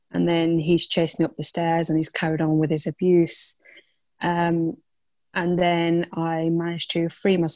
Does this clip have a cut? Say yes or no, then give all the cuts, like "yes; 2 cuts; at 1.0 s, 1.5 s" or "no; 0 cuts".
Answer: no; 0 cuts